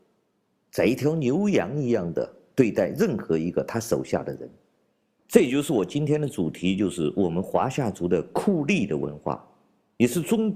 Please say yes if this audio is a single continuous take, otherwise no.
yes